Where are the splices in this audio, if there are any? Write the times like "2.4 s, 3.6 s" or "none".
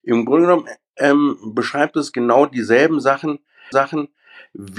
3.7 s